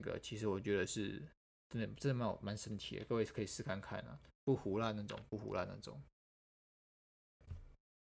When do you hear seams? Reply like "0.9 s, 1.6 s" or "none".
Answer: 4.2 s